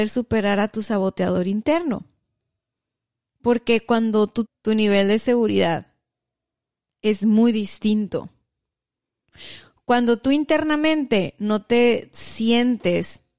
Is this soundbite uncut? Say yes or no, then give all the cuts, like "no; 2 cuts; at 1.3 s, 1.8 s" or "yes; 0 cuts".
no; 1 cut; at 4.5 s